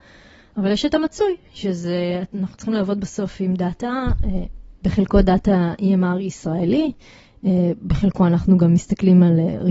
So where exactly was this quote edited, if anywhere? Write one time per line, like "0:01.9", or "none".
0:04.7